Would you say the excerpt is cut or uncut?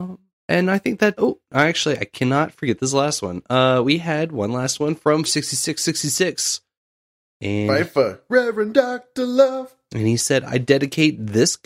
cut